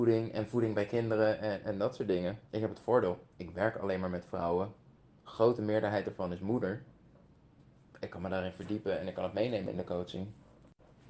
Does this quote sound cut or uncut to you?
cut